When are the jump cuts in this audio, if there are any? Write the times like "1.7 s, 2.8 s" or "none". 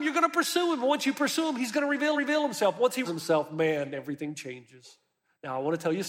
2.1 s, 3.0 s